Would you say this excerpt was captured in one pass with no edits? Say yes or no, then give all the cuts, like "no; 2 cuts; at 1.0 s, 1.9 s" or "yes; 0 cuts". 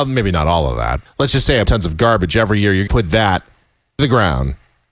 no; 4 cuts; at 1.1 s, 1.6 s, 2.9 s, 4.0 s